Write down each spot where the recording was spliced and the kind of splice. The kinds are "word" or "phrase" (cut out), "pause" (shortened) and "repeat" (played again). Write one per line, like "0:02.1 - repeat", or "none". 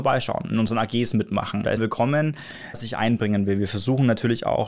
0:01.8 - word
0:02.7 - word

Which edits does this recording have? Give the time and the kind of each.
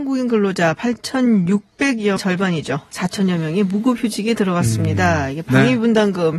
0:02.2 - word

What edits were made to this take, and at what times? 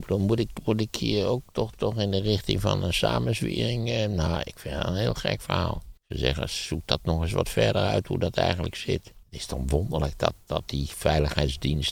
0:06.0 - pause
0:09.2 - pause

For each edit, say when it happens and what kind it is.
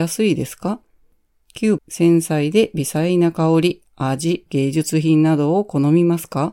0:01.8 - word
0:04.5 - word

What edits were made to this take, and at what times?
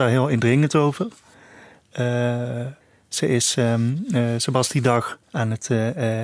0:02.8 - pause
0:05.2 - pause

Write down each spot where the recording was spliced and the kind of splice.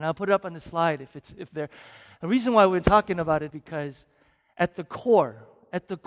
0:01.1 - word
0:01.5 - word
0:03.5 - word

